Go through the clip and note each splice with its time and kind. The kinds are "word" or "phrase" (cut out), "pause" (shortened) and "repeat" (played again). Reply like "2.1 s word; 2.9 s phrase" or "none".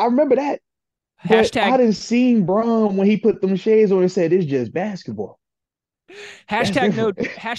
none